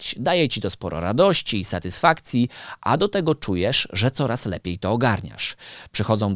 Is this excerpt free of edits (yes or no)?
yes